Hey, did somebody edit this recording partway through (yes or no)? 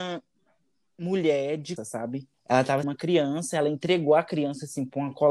yes